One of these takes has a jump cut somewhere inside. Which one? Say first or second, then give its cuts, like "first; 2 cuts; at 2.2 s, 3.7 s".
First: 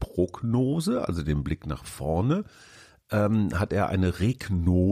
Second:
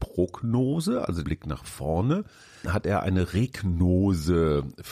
second; 2 cuts; at 1.2 s, 2.6 s